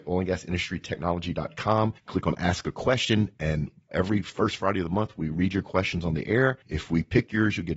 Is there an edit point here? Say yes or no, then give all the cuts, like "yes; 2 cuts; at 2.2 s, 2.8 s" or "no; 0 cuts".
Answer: yes; 2 cuts; at 2.0 s, 6.6 s